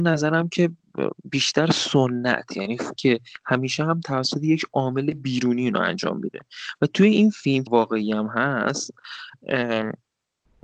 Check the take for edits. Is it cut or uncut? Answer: cut